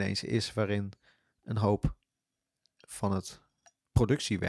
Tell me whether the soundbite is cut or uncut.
uncut